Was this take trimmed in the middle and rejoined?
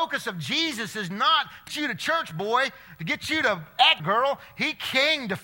yes; 2 cuts; at 1.7 s, 4.0 s

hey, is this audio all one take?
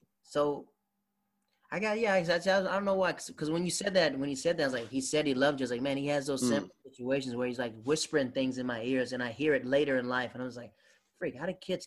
yes; 0 cuts

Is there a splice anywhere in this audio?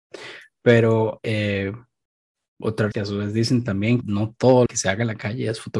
yes; 4 cuts; at 1.2 s, 2.9 s, 4.0 s, 4.7 s

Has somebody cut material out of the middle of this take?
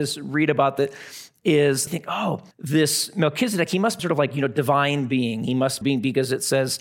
yes; 4 cuts; at 1.9 s, 2.5 s, 4.0 s, 5.8 s

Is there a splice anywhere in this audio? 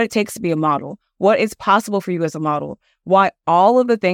no; 0 cuts

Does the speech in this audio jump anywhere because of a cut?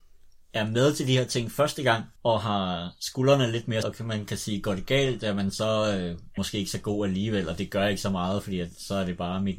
yes; 3 cuts; at 2.2 s, 3.8 s, 6.4 s

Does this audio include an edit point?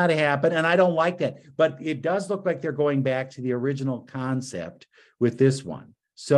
no; 0 cuts

